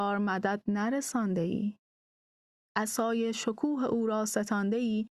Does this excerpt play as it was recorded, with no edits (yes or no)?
yes